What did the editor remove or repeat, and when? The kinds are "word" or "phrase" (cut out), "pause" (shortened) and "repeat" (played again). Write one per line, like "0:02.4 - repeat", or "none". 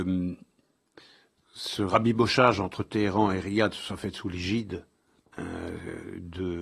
none